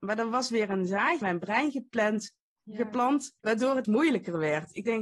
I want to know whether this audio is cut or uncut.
cut